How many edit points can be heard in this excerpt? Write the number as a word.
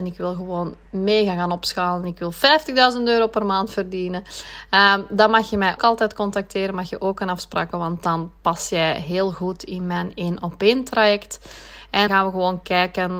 three